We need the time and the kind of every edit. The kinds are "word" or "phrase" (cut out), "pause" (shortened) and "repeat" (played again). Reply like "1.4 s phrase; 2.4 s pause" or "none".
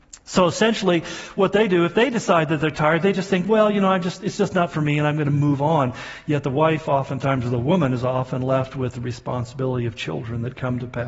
none